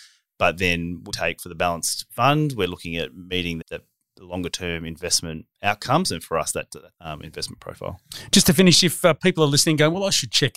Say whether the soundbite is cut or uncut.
cut